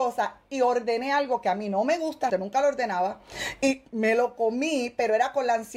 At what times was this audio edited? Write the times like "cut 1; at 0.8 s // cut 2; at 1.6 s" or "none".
cut 1; at 2.3 s